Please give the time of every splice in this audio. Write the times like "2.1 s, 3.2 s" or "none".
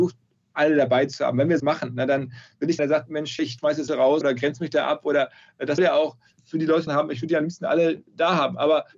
1.6 s, 2.8 s, 3.4 s, 3.9 s, 4.2 s, 5.8 s, 6.9 s